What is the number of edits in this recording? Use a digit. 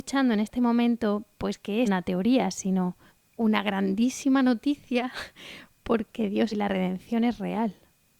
4